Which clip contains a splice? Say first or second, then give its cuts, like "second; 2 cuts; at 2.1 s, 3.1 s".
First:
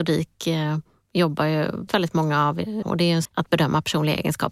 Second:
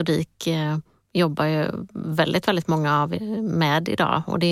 first; 3 cuts; at 1.9 s, 2.8 s, 3.2 s